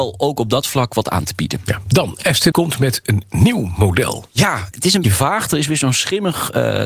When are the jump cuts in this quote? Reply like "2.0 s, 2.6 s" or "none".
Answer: 2.5 s, 4.7 s, 5.0 s